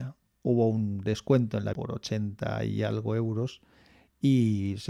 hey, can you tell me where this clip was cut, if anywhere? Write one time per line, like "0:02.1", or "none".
0:01.7